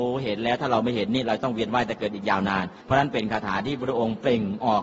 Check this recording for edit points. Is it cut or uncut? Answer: cut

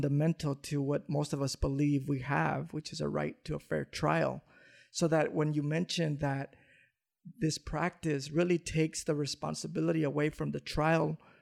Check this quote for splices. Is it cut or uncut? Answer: uncut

